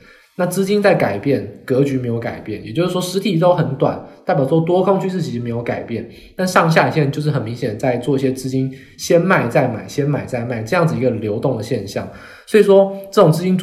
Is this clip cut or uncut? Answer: uncut